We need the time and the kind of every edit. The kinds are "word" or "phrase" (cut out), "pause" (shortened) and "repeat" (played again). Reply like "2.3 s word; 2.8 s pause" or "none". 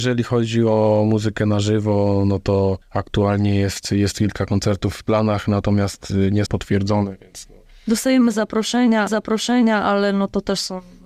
2.8 s pause; 6.5 s phrase; 9.1 s repeat